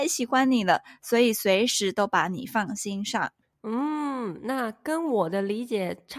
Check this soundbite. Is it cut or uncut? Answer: uncut